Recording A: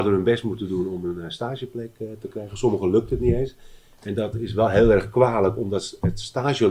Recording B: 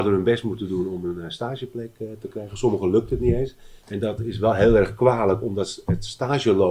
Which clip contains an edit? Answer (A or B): B